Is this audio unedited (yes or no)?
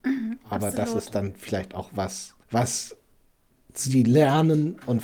no